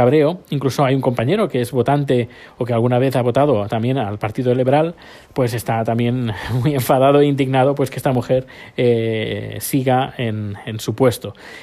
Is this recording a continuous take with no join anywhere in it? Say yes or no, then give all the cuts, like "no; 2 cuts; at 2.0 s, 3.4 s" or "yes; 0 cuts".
yes; 0 cuts